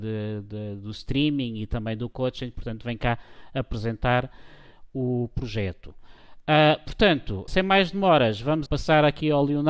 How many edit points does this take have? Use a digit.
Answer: 2